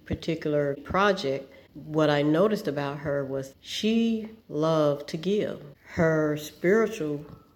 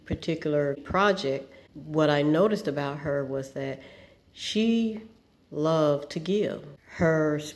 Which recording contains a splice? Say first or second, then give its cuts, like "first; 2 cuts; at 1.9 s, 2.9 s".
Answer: first; 2 cuts; at 3.5 s, 4.4 s